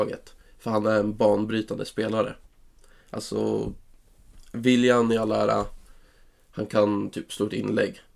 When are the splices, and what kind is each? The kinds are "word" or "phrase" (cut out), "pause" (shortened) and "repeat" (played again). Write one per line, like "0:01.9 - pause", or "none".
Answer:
none